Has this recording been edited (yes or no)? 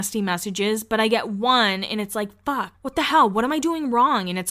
yes